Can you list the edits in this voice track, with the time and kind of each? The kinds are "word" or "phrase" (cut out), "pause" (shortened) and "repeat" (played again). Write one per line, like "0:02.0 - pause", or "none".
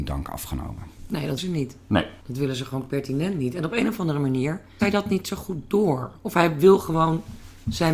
0:01.4 - word
0:02.2 - pause
0:04.8 - word